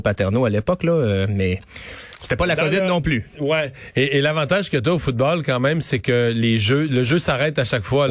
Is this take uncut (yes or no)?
yes